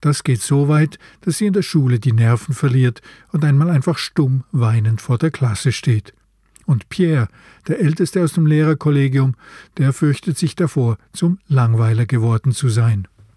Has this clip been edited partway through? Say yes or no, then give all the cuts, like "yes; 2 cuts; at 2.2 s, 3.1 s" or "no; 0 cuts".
no; 0 cuts